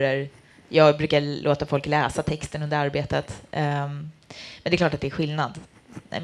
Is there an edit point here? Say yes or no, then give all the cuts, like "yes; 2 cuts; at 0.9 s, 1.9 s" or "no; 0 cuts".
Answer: no; 0 cuts